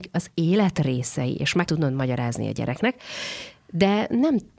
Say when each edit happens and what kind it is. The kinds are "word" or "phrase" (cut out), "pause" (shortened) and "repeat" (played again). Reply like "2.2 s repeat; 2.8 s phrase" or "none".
1.7 s word